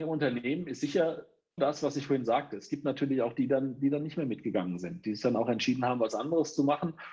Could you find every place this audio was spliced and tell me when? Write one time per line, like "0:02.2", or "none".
0:01.6